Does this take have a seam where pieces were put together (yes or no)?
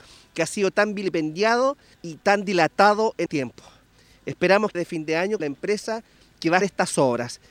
yes